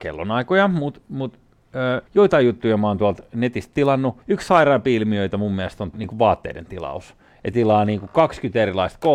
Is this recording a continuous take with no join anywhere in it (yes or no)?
no